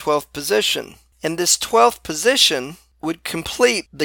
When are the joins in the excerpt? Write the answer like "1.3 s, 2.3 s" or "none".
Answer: none